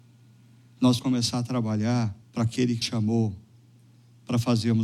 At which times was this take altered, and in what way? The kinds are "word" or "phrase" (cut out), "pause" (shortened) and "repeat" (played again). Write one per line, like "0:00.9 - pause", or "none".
0:01.0 - word
0:02.2 - pause
0:02.8 - word